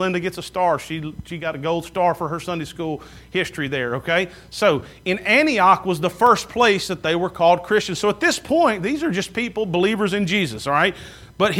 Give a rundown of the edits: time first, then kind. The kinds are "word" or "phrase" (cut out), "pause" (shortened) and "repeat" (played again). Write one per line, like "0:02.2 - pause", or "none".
none

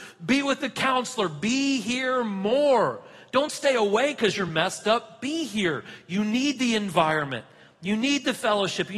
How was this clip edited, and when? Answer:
none

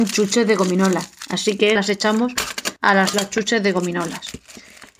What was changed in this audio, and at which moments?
0:01.8 - word
0:02.8 - pause
0:03.1 - phrase

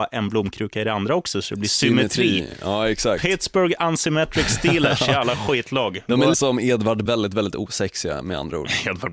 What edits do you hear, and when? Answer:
0:06.3 - word
0:07.1 - word

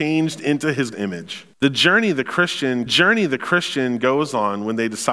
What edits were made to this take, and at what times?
0:00.9 - word
0:01.5 - pause
0:02.9 - repeat

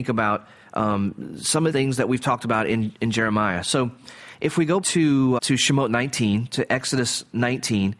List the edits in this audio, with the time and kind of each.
0:01.7 - word
0:04.8 - word
0:05.4 - word

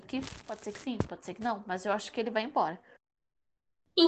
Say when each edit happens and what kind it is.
none

